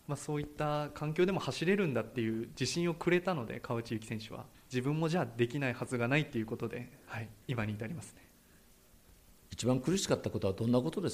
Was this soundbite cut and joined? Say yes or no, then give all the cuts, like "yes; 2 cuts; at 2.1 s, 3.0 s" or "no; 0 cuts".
yes; 2 cuts; at 4.5 s, 7.4 s